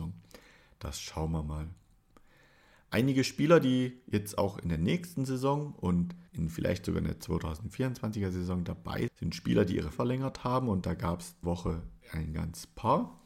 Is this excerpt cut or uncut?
cut